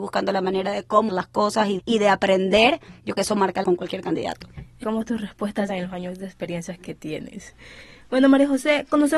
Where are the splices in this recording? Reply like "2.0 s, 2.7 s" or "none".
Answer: 1.1 s, 1.8 s, 3.1 s, 3.6 s, 4.8 s, 5.7 s